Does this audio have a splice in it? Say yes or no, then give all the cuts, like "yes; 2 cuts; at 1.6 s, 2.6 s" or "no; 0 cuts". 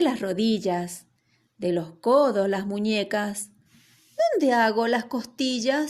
no; 0 cuts